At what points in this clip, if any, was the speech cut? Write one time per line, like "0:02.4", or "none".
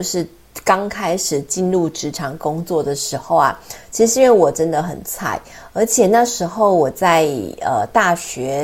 none